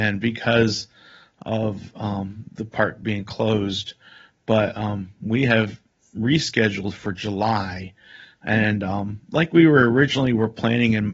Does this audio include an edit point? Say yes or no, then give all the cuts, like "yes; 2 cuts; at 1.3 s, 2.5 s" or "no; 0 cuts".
no; 0 cuts